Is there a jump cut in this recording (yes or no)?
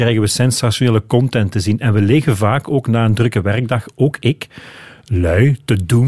no